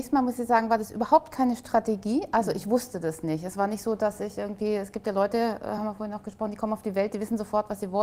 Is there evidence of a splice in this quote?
no; 0 cuts

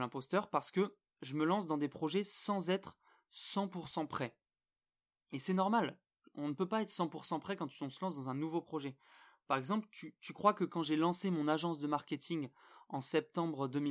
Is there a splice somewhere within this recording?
no; 0 cuts

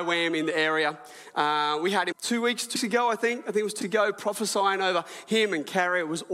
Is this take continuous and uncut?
no; 3 cuts; at 2.1 s, 2.8 s, 3.8 s

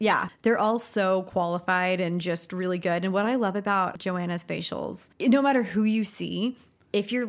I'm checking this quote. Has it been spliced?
no; 0 cuts

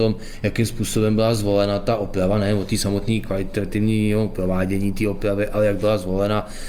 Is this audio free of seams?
yes; 0 cuts

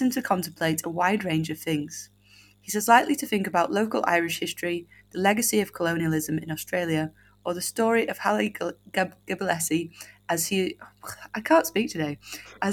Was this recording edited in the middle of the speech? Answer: no; 0 cuts

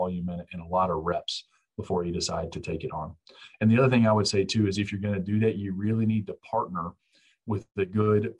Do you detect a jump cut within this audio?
no; 0 cuts

